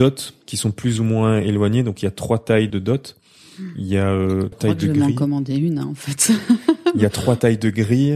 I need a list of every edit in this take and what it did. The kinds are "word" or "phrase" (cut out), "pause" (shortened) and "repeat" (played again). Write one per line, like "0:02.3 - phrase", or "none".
0:02.7 - word
0:04.5 - word